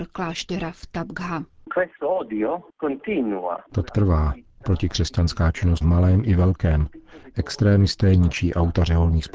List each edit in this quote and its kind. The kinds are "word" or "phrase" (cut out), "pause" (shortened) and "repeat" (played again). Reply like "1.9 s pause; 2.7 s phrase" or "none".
3.9 s word; 5.8 s phrase